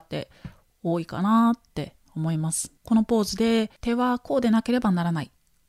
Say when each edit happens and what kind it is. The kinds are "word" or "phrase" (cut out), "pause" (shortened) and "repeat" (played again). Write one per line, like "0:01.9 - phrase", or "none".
0:02.8 - pause
0:03.8 - pause